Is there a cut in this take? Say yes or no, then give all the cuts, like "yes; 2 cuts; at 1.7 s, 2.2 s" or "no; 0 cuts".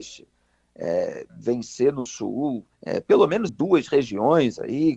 yes; 3 cuts; at 1.3 s, 2.7 s, 3.5 s